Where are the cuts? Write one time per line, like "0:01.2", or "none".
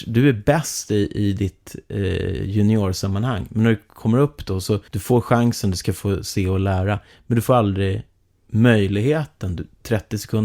0:04.9